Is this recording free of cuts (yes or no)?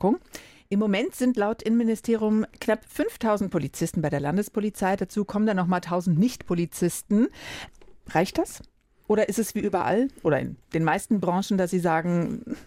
yes